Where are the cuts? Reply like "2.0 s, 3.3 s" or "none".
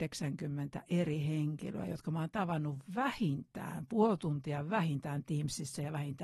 none